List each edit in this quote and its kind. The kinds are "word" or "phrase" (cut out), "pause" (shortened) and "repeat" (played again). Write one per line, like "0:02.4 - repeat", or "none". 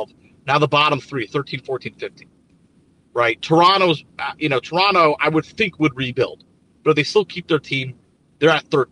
none